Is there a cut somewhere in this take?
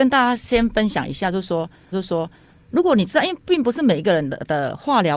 yes; 1 cut; at 1.9 s

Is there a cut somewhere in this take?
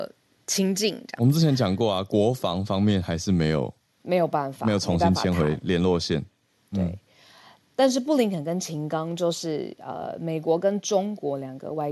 no; 0 cuts

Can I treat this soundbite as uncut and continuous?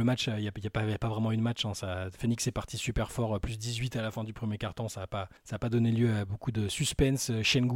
no; 1 cut; at 5.4 s

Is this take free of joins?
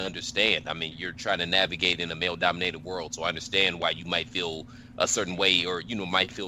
no; 1 cut; at 0.9 s

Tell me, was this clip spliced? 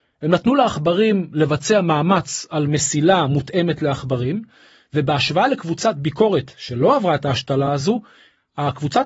no; 0 cuts

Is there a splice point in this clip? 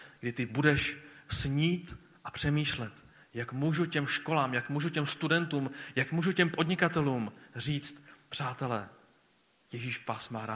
no; 0 cuts

